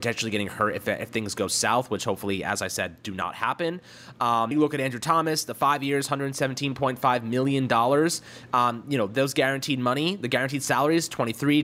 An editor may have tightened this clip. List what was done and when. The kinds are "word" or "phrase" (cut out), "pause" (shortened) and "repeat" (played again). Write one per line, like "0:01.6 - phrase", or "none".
0:04.5 - word